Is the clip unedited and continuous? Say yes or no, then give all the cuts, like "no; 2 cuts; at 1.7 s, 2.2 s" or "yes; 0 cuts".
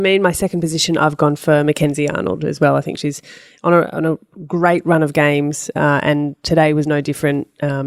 yes; 0 cuts